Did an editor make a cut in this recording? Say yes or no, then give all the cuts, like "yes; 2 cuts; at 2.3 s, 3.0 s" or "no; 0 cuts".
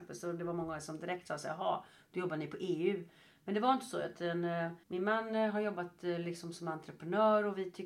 yes; 1 cut; at 4.8 s